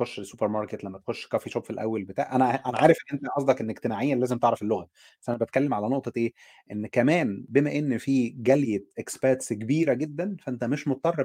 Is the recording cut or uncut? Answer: uncut